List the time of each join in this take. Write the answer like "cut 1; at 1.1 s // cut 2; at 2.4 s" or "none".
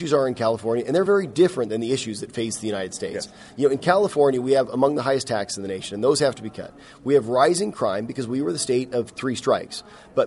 none

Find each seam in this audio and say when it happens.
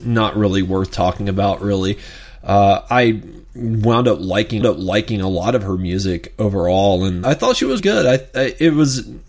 cut 1; at 4.6 s // cut 2; at 7.2 s // cut 3; at 7.8 s

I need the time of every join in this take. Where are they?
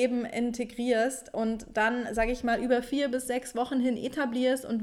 none

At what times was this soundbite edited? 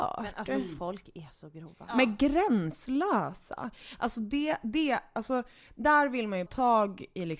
cut 1; at 6.5 s

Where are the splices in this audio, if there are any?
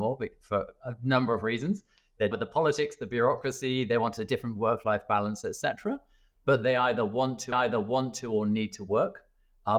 cut 1; at 2.3 s // cut 2; at 7.5 s

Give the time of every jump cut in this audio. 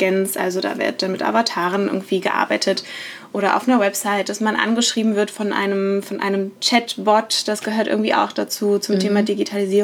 none

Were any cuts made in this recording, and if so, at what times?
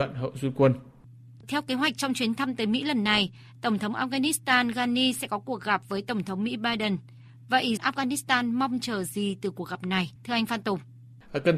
cut 1; at 7.8 s // cut 2; at 10.2 s

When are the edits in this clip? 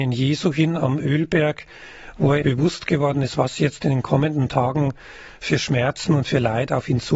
cut 1; at 2.4 s

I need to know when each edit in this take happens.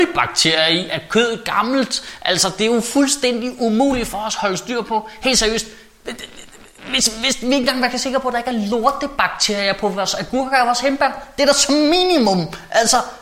none

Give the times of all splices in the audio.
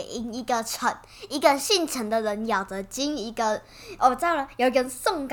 none

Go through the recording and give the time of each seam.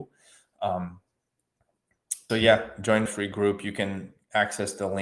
cut 1; at 2.3 s // cut 2; at 3.1 s

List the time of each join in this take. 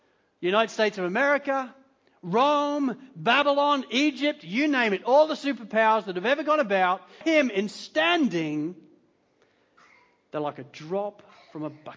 cut 1; at 7.2 s

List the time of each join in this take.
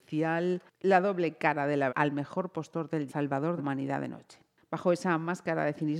cut 1; at 1.9 s // cut 2; at 3.1 s // cut 3; at 3.6 s

